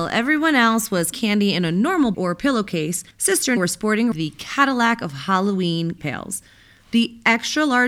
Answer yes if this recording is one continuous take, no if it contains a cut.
no